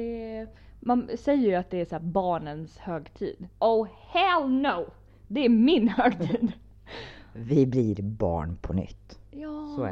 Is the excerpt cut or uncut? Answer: cut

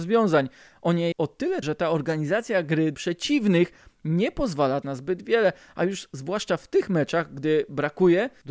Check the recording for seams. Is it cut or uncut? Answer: cut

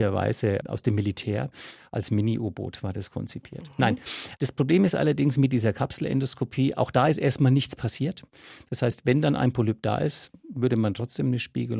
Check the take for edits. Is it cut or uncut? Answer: cut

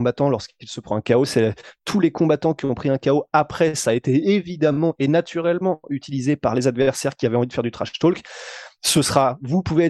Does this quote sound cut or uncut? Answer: uncut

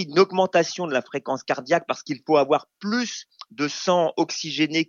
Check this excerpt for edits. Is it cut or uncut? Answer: uncut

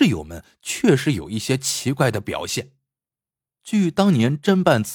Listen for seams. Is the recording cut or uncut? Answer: cut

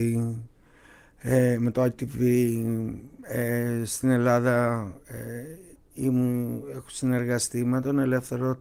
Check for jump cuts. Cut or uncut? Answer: uncut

